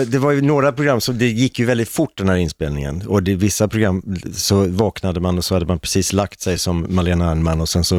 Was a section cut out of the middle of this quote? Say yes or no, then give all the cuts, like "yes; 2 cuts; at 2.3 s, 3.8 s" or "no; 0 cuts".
no; 0 cuts